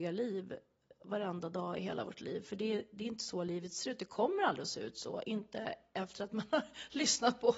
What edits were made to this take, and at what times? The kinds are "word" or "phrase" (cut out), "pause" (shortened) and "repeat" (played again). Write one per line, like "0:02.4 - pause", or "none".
none